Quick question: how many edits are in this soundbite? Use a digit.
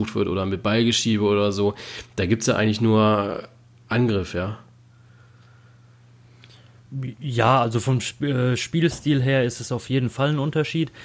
0